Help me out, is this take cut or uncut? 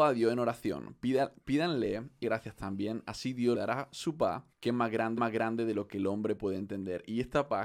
cut